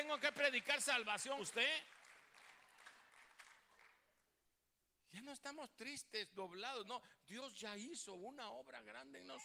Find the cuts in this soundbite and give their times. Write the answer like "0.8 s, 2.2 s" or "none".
1.4 s